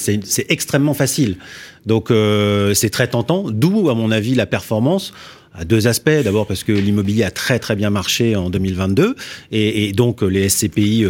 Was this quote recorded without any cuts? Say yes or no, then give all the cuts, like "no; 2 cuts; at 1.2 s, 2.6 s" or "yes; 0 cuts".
yes; 0 cuts